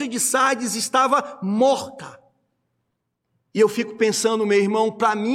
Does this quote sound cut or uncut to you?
uncut